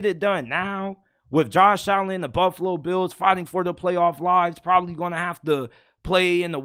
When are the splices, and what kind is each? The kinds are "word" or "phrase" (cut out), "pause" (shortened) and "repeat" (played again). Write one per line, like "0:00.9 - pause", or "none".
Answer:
none